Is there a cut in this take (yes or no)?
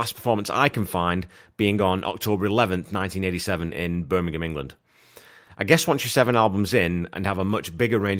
no